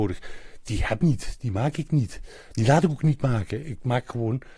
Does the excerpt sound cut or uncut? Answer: cut